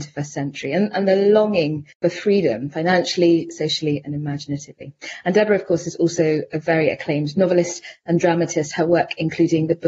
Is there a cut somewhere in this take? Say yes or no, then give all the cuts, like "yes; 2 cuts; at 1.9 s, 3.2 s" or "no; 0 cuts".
yes; 1 cut; at 1.9 s